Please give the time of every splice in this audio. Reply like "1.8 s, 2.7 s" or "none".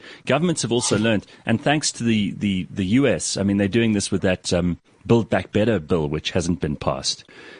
none